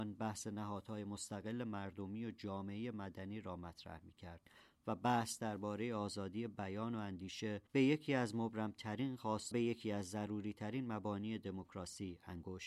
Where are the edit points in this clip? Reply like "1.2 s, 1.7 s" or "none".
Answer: 7.7 s, 9.5 s